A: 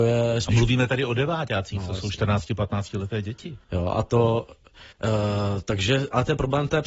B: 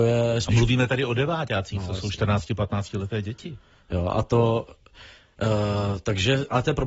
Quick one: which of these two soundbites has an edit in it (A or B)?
A